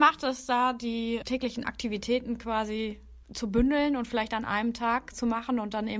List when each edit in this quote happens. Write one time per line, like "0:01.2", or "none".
0:01.2
0:03.2